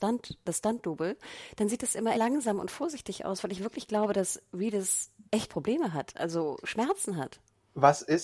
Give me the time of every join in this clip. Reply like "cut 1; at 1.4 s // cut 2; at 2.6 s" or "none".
cut 1; at 2.1 s // cut 2; at 5.3 s